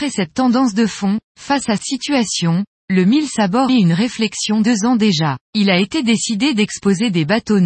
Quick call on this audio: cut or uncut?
cut